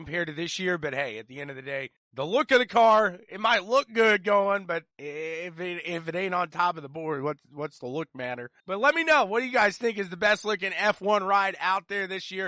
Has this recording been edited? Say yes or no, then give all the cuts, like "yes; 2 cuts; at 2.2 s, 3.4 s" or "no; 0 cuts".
yes; 3 cuts; at 2.0 s, 4.9 s, 8.6 s